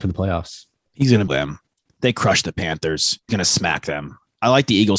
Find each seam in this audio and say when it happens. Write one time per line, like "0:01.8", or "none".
0:01.3
0:03.3